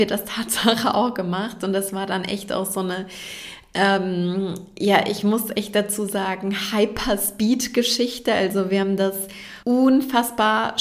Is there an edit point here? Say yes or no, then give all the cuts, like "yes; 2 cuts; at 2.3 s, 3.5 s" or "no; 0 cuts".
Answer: yes; 1 cut; at 9.6 s